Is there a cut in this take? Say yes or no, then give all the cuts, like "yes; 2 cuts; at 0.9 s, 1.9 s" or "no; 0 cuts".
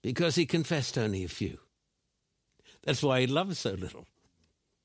no; 0 cuts